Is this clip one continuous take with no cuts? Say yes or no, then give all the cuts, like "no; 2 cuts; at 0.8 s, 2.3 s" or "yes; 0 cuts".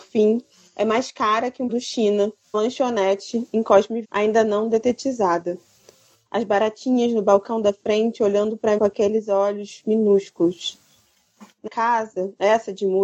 no; 5 cuts; at 1.7 s, 2.5 s, 4.0 s, 8.8 s, 11.7 s